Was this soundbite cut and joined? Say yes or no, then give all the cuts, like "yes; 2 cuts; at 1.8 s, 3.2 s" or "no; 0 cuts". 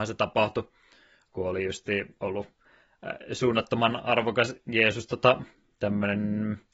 no; 0 cuts